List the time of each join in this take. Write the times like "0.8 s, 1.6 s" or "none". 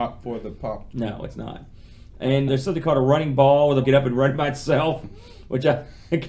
0.9 s, 2.5 s, 3.8 s